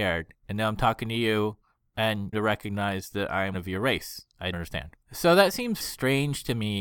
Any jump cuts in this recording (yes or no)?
yes